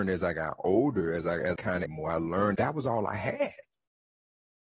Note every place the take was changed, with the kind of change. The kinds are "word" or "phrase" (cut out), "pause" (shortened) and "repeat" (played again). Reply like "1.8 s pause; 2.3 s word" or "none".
1.6 s word; 1.9 s phrase; 2.5 s word